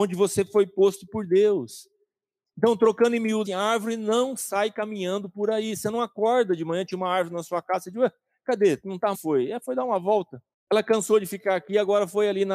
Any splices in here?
yes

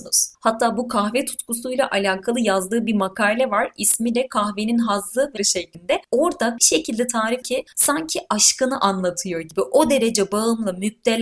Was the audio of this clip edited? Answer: yes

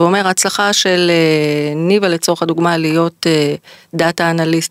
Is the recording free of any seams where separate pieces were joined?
yes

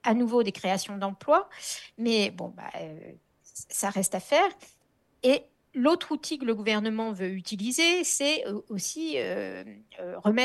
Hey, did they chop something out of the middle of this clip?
no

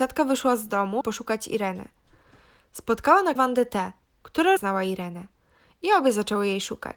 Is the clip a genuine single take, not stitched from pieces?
no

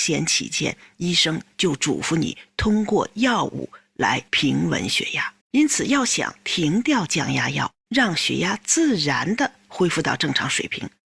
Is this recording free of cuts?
no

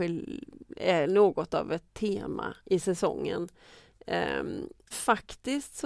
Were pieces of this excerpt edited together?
yes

